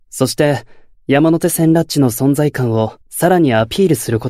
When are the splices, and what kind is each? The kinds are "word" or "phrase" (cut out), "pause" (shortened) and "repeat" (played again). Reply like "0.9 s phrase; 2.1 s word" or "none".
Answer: 0.9 s pause; 3.0 s pause